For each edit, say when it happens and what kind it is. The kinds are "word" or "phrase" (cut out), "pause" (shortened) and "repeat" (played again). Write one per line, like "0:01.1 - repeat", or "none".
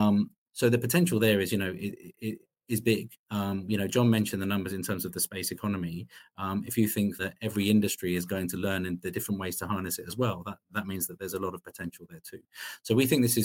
0:03.2 - pause
0:07.2 - word
0:10.7 - word